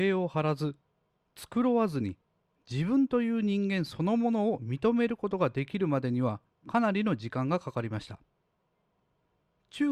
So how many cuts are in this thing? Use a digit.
0